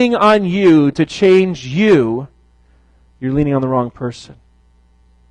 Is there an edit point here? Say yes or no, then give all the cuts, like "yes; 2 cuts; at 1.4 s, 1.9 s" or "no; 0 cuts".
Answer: no; 0 cuts